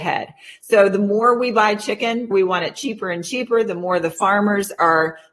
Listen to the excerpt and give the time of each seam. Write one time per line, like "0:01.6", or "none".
0:02.3